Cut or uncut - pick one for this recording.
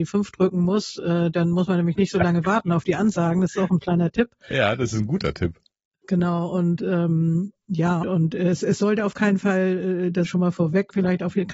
cut